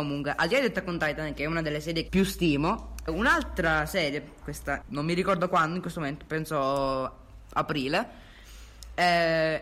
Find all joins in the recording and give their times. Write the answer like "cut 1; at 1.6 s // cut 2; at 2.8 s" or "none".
cut 1; at 2.1 s // cut 2; at 3.1 s // cut 3; at 4.4 s // cut 4; at 4.8 s